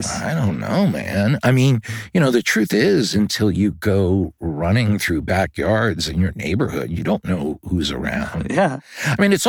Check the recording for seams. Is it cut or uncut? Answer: uncut